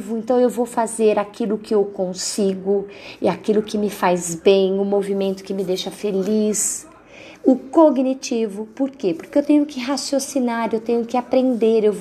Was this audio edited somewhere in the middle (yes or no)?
no